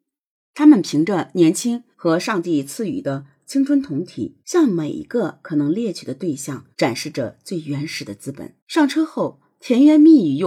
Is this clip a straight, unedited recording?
no; 4 cuts; at 1.9 s, 4.4 s, 6.7 s, 8.6 s

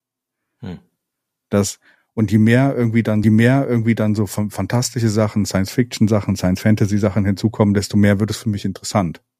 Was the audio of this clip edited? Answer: yes; 1 cut; at 3.2 s

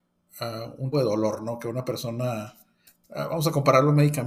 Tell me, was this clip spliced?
yes; 1 cut; at 0.9 s

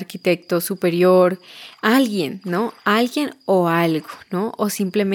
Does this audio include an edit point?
no; 0 cuts

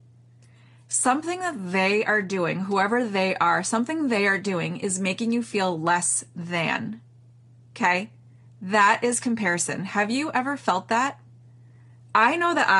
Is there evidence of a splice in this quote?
no; 0 cuts

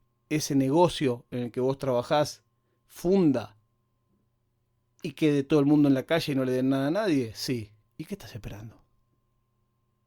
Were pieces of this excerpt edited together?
no; 0 cuts

